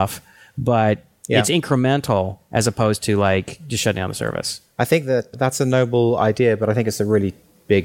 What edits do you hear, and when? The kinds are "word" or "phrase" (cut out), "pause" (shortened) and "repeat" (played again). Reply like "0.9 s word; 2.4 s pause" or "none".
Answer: 5.3 s word